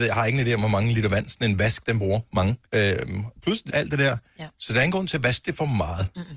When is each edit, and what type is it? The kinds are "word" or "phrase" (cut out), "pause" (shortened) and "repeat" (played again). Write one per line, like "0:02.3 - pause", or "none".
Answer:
0:02.7 - pause
0:03.7 - phrase